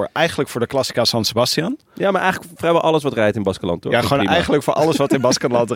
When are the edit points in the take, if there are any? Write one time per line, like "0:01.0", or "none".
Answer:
none